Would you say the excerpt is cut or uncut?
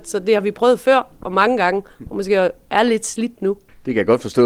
uncut